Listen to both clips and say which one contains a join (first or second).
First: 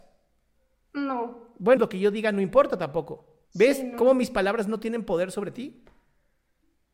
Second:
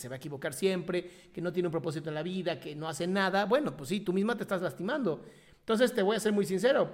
first